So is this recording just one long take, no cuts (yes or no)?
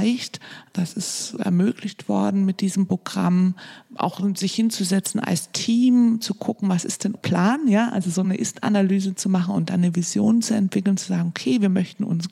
no